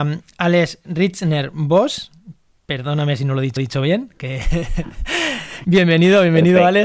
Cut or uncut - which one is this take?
cut